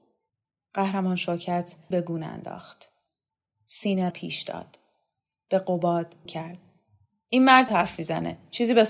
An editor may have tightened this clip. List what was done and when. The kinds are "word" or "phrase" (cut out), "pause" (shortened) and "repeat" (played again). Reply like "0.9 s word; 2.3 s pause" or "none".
1.9 s word; 4.1 s word; 6.3 s word; 7.7 s word